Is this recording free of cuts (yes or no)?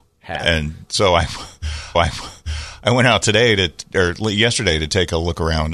no